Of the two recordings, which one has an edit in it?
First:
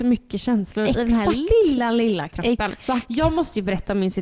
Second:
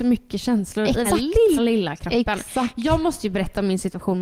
second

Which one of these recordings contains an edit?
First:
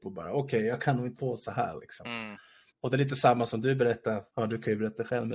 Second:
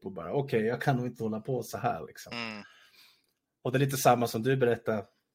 first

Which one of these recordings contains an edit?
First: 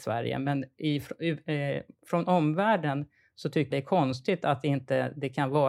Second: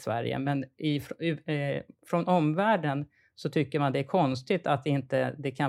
first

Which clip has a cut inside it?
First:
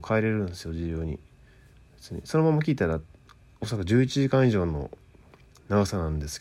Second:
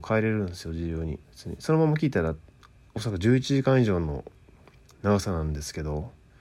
second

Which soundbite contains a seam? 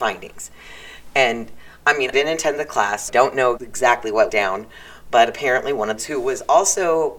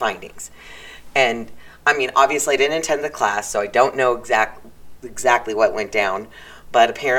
first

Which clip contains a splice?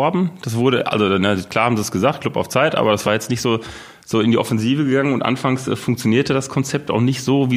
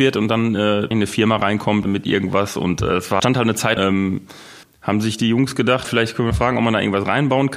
second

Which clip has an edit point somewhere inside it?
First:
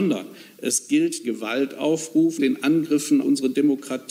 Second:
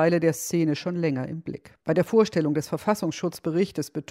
first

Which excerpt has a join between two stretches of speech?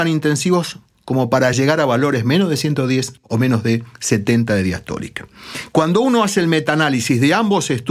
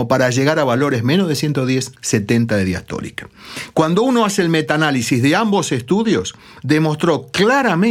second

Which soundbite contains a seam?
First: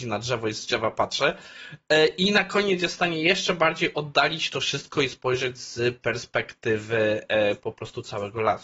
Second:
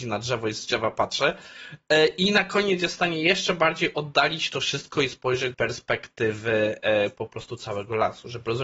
second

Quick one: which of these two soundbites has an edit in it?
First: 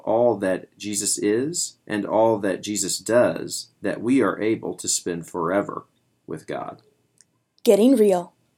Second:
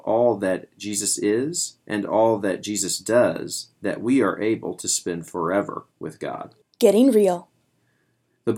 second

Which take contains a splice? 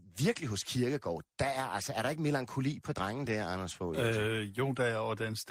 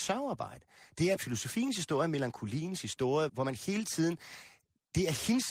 second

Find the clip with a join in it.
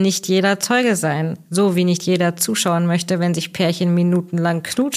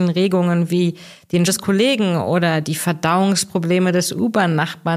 second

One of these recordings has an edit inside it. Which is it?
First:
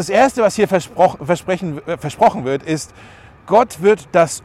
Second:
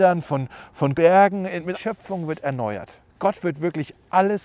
second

